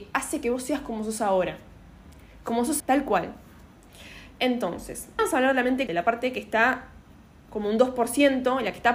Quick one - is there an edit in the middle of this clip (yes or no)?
yes